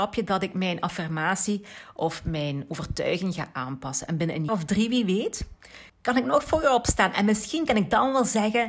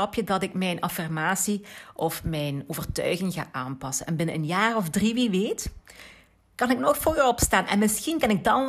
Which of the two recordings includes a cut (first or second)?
first